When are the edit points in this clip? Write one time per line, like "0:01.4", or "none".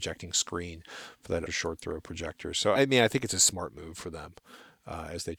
0:01.5
0:02.7

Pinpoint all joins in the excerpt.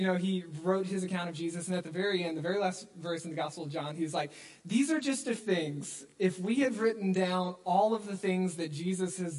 0:05.4

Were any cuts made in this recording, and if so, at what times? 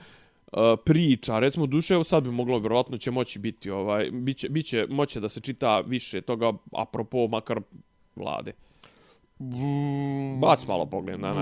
0:08.2

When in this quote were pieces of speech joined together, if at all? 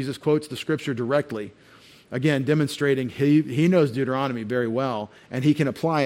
none

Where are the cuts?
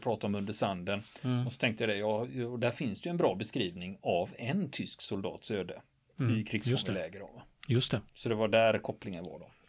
0:08.1

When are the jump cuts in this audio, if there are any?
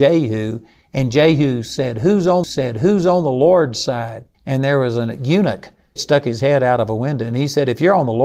0:02.4
0:04.3
0:06.0

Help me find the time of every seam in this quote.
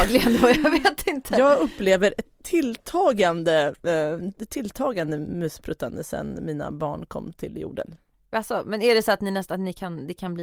none

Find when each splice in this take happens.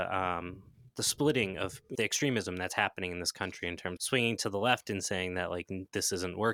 0:01.9
0:04.0

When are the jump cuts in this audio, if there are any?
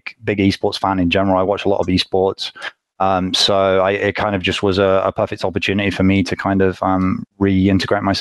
0:07.3

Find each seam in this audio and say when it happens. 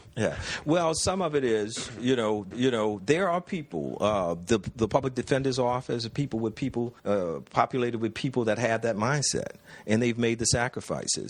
0:02.5
0:07.0

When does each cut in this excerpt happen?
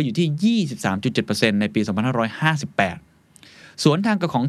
none

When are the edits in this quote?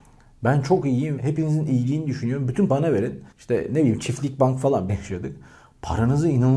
0:01.2
0:02.7
0:03.3
0:04.9

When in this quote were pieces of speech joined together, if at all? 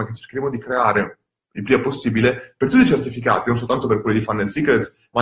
none

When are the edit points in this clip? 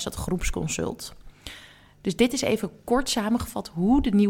none

